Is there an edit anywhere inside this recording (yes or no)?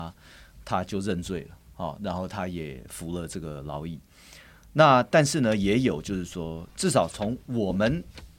no